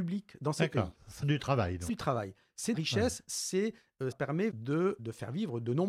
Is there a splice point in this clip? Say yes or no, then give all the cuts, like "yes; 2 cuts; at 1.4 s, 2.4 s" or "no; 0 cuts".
yes; 6 cuts; at 1.2 s, 1.9 s, 2.7 s, 4.1 s, 4.5 s, 5.0 s